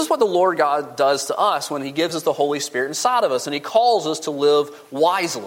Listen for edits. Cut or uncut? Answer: uncut